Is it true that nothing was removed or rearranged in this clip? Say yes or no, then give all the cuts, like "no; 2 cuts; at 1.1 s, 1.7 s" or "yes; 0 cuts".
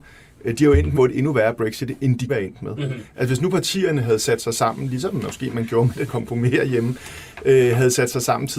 no; 3 cuts; at 0.9 s, 2.3 s, 6.1 s